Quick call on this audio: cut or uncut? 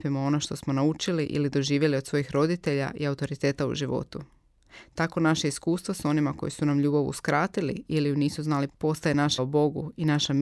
cut